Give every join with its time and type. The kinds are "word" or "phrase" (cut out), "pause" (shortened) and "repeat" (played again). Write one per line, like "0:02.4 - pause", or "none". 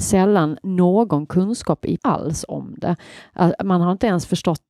0:02.0 - word